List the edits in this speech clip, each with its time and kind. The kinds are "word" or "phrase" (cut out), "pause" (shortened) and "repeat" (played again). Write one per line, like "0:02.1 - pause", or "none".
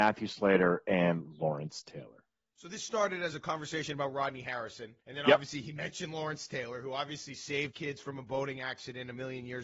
0:05.0 - pause
0:07.7 - word